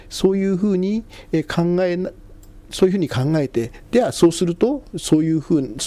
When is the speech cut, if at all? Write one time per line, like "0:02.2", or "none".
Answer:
none

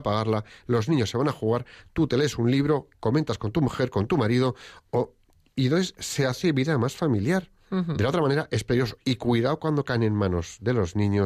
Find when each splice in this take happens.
none

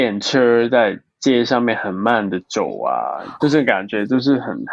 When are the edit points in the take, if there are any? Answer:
0:03.4

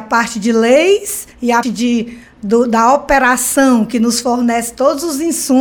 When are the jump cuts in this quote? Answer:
0:01.3
0:01.6

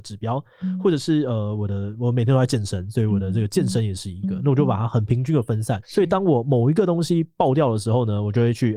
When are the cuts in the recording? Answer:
0:05.8

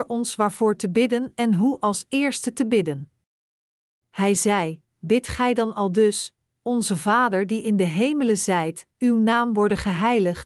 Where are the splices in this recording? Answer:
0:08.9

